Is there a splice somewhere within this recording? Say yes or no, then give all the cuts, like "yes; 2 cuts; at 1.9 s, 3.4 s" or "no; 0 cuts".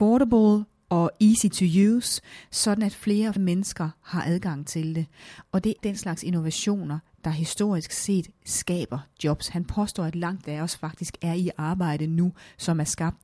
yes; 3 cuts; at 3.4 s, 5.8 s, 10.4 s